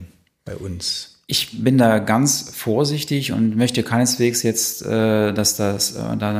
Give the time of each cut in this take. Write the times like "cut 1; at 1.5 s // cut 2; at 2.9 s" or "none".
none